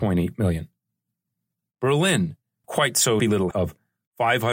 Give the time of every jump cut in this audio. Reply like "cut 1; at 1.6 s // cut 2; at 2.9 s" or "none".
cut 1; at 2.6 s // cut 2; at 3.2 s // cut 3; at 3.5 s